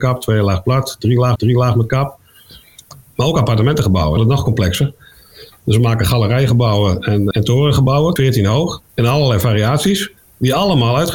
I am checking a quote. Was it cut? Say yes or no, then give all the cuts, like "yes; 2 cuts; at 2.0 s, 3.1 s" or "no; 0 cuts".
yes; 6 cuts; at 1.4 s, 4.2 s, 7.3 s, 8.2 s, 8.9 s, 10.2 s